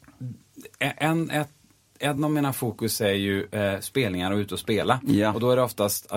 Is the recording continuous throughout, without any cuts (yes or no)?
yes